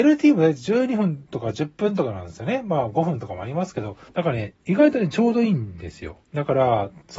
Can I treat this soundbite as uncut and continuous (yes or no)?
no